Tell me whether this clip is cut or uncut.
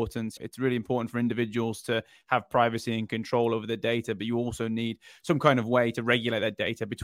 uncut